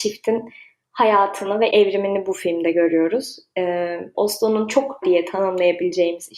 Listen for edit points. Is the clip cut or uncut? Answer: cut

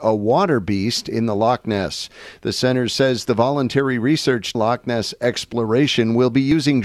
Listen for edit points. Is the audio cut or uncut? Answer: cut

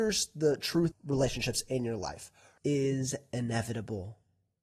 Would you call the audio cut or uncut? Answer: cut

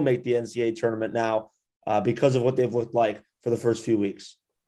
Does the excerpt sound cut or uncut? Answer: uncut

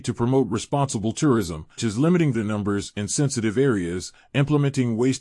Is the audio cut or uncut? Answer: cut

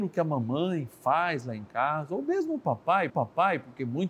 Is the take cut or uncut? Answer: cut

